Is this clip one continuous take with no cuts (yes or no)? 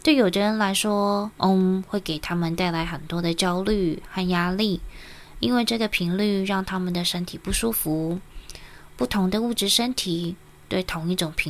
yes